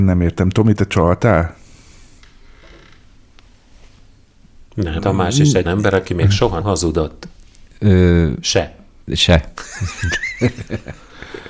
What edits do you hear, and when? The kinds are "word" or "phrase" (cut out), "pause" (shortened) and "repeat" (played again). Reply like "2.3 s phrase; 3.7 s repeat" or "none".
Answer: 5.0 s word; 5.6 s word; 6.6 s word